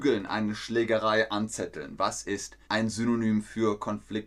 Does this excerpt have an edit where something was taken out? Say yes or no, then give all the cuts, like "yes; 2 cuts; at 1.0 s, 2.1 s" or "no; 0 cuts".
yes; 1 cut; at 2.6 s